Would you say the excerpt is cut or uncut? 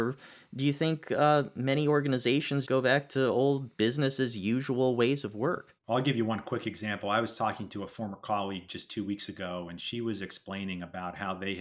cut